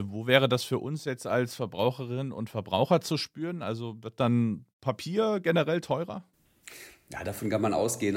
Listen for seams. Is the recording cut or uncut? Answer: cut